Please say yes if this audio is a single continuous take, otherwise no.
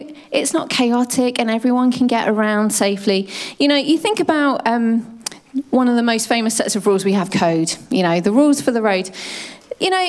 no